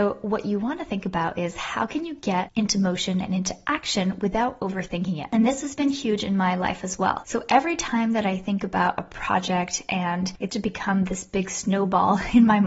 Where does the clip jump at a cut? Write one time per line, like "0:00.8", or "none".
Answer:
0:10.5